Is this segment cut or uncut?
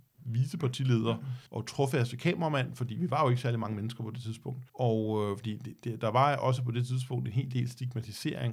cut